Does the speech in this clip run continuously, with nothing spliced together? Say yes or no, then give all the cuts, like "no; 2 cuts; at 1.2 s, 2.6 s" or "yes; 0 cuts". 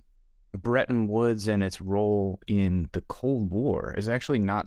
yes; 0 cuts